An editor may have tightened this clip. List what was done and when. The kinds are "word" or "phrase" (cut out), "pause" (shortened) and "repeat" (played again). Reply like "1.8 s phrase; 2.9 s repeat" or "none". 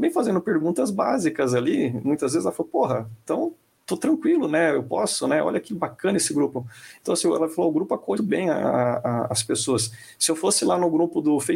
8.1 s word

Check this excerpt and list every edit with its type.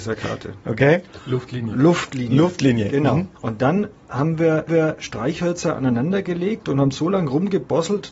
3.4 s pause; 4.7 s repeat

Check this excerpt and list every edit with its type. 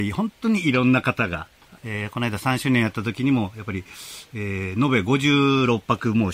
1.8 s phrase

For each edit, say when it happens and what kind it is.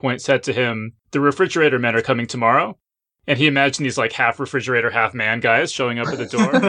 1.0 s pause

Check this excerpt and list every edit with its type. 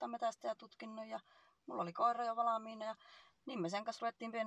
none

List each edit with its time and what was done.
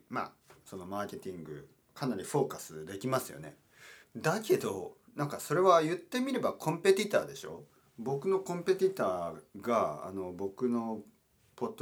4.0 s pause; 5.0 s pause; 7.8 s pause; 9.5 s pause

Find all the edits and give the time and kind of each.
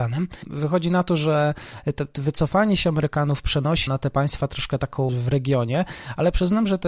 3.9 s word; 5.1 s word

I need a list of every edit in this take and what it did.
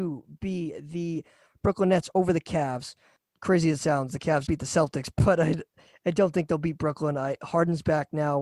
4.5 s word

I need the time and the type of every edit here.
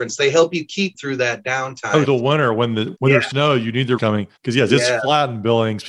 0.9 s phrase; 2.0 s word; 2.9 s word; 3.3 s phrase; 4.0 s word; 4.4 s pause

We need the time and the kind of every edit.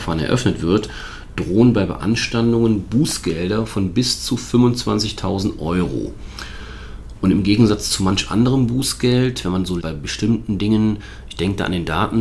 9.8 s word

